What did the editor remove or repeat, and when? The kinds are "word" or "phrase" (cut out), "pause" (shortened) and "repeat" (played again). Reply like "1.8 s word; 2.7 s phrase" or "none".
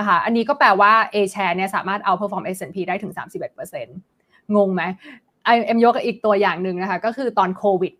none